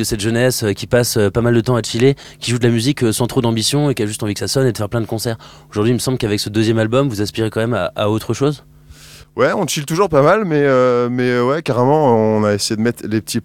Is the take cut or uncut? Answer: uncut